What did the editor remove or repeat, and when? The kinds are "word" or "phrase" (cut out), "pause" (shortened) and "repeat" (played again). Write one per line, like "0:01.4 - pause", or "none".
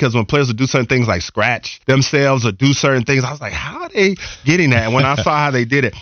0:01.8 - pause